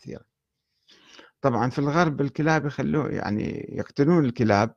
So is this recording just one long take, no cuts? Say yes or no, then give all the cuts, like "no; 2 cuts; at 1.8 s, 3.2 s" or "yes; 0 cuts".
yes; 0 cuts